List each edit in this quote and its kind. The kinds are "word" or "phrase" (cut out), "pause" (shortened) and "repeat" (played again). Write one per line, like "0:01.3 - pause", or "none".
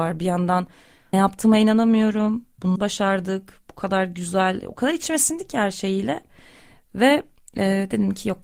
0:01.1 - word
0:02.8 - word

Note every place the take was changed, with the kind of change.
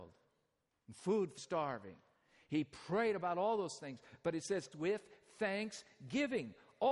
0:01.4 - word
0:04.7 - word

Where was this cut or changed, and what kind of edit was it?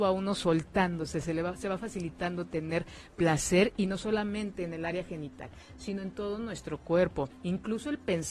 0:07.3 - pause

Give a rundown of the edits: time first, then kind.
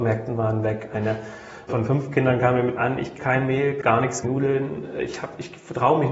0:01.7 - word
0:02.8 - word
0:03.2 - word
0:03.8 - word
0:04.2 - word

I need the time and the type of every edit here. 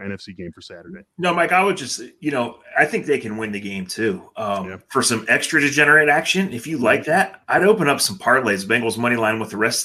none

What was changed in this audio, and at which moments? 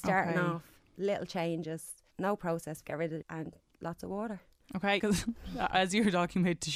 0:02.1 - pause
0:02.8 - word
0:03.2 - phrase
0:05.0 - word

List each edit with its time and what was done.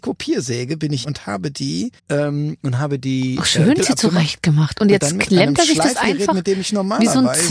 0:01.0 - word
0:02.0 - pause
0:03.8 - word

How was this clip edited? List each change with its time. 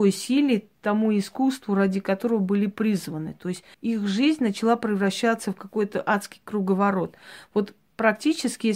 0:03.7 - pause

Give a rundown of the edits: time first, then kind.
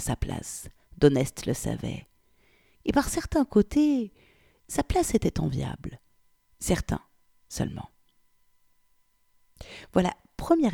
none

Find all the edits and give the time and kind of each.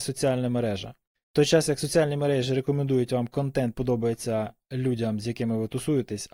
0:03.7 - word

